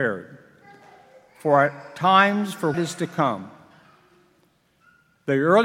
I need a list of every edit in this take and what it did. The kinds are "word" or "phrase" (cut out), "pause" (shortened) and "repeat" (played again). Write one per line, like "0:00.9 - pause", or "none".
0:02.7 - word